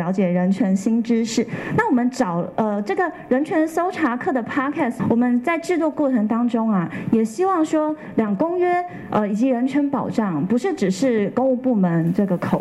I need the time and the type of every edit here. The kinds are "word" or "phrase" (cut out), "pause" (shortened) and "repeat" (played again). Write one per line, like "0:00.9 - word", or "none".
0:05.0 - word